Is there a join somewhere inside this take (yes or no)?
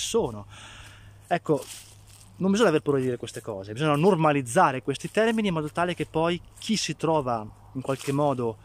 no